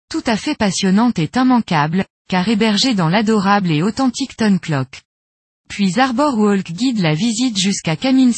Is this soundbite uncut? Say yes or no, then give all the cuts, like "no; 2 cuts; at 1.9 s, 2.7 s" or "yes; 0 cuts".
yes; 0 cuts